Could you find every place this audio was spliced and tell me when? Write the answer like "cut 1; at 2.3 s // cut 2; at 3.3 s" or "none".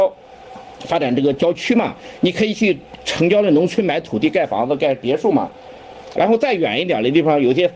cut 1; at 6.1 s

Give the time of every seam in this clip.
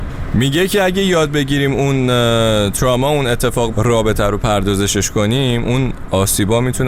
cut 1; at 3.7 s

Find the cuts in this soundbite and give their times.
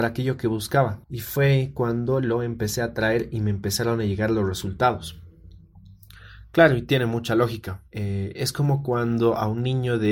cut 1; at 1.0 s // cut 2; at 7.9 s

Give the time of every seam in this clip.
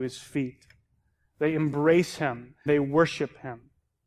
cut 1; at 2.7 s

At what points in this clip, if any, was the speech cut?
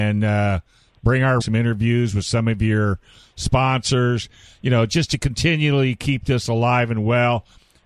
cut 1; at 1.4 s

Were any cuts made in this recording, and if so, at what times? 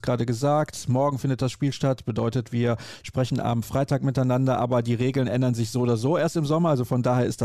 none

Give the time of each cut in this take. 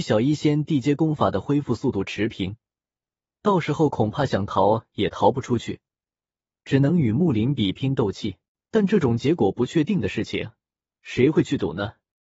cut 1; at 8.5 s

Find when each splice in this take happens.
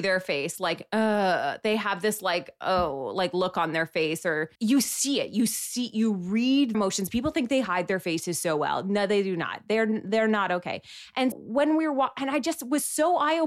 cut 1; at 4.6 s // cut 2; at 6.7 s // cut 3; at 11.3 s

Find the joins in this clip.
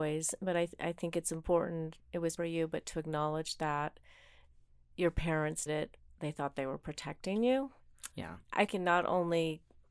cut 1; at 2.4 s // cut 2; at 5.7 s // cut 3; at 8.1 s // cut 4; at 8.7 s

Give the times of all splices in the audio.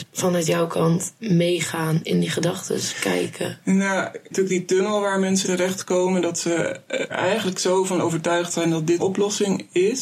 cut 1; at 1.2 s // cut 2; at 4.3 s // cut 3; at 5.4 s // cut 4; at 7.1 s // cut 5; at 9.0 s

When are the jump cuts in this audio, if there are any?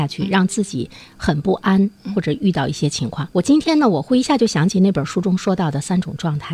cut 1; at 3.3 s

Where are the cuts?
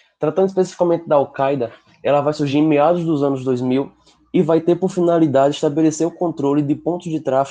none

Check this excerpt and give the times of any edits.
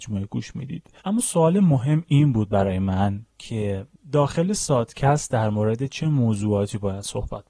cut 1; at 1.0 s

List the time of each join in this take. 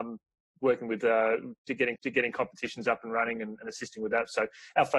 cut 1; at 2.0 s

